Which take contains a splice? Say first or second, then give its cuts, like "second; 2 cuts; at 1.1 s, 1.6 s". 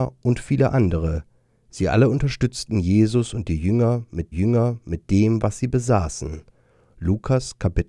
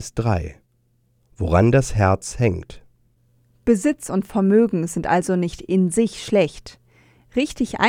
first; 1 cut; at 4.3 s